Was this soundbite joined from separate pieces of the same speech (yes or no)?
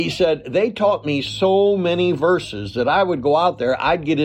no